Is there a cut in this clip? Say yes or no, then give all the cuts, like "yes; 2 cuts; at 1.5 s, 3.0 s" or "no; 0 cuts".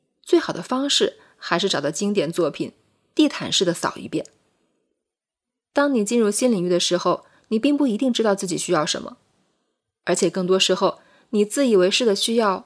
no; 0 cuts